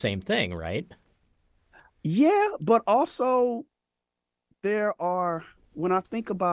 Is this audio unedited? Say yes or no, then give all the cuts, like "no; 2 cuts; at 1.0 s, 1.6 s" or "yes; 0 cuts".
yes; 0 cuts